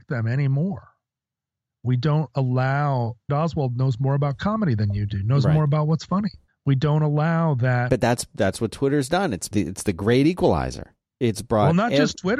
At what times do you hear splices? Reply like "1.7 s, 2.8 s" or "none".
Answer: 3.3 s, 6.5 s, 7.9 s, 9.5 s

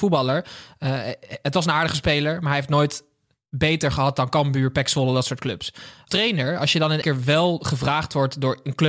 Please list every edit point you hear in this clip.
6.1 s, 7.0 s

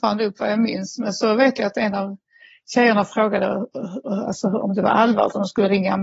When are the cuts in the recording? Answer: none

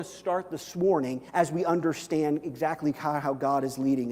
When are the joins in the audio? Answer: 1.3 s

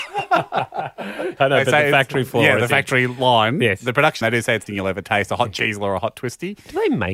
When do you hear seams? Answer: 1.4 s, 4.2 s, 4.7 s

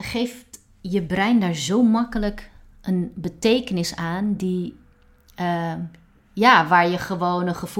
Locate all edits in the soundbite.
none

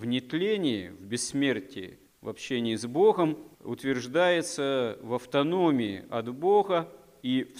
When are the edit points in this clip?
3.5 s

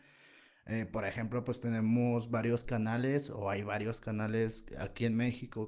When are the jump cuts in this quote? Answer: none

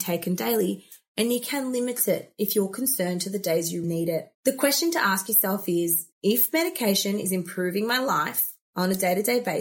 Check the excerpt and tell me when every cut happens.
3.8 s, 4.3 s, 6.1 s

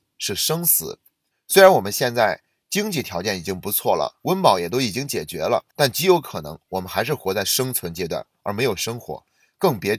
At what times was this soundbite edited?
1.3 s, 5.7 s

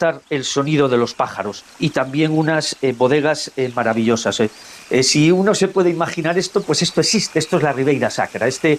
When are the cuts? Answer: 1.7 s

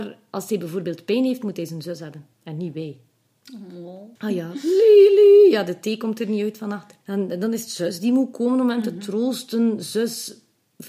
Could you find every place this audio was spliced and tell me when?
2.3 s, 4.2 s, 7.0 s

